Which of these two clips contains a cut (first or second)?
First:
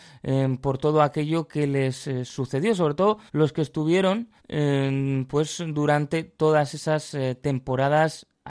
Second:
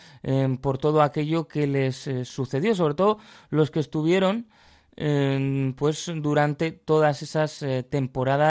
first